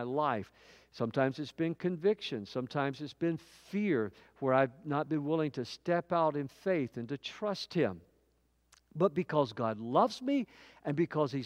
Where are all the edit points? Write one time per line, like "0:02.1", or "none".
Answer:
none